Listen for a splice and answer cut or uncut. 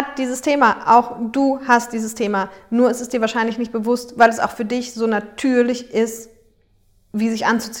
uncut